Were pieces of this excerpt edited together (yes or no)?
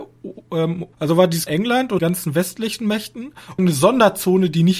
yes